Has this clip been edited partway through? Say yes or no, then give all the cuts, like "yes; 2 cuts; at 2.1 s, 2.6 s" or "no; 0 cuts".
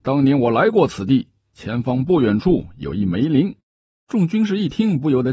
yes; 1 cut; at 3.9 s